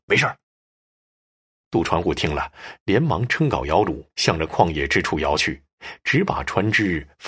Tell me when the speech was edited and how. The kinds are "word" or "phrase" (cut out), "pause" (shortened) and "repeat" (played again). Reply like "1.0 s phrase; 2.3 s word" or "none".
4.1 s pause